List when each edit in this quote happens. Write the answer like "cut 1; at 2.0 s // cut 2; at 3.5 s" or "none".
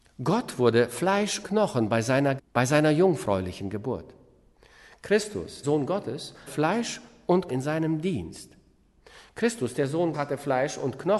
cut 1; at 1.4 s // cut 2; at 2.4 s // cut 3; at 5.6 s // cut 4; at 6.5 s // cut 5; at 7.5 s // cut 6; at 10.1 s